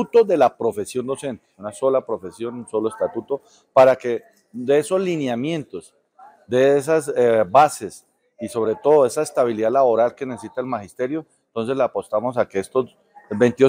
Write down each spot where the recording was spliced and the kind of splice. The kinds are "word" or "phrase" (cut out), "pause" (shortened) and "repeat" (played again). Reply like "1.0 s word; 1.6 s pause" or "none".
none